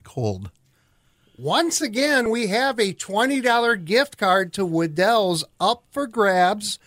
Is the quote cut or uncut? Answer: uncut